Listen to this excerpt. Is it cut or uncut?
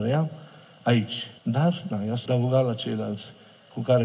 cut